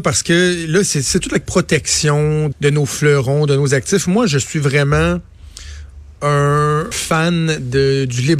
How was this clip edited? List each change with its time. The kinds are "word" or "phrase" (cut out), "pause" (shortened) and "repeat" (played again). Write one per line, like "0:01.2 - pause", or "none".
0:01.4 - phrase
0:02.5 - word
0:06.9 - word